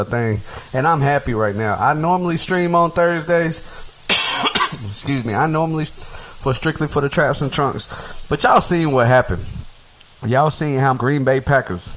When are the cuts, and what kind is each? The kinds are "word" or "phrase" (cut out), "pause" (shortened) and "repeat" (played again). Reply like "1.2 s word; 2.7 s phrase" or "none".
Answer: 5.9 s word; 10.9 s word